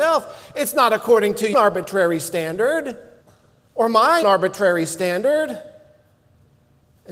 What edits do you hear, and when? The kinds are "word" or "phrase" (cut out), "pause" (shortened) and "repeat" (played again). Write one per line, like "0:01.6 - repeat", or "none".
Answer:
0:01.5 - phrase
0:03.2 - pause
0:04.2 - word